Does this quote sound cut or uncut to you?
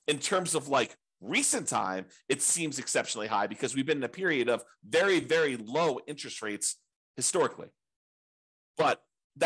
uncut